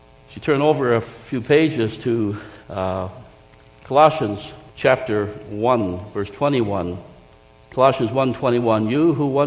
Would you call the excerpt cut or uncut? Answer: cut